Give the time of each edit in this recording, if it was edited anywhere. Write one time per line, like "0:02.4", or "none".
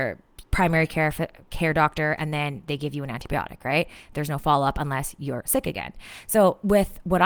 none